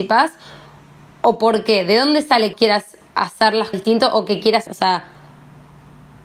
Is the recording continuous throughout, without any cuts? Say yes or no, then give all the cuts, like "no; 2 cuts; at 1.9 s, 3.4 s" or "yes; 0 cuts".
no; 3 cuts; at 2.5 s, 3.7 s, 4.7 s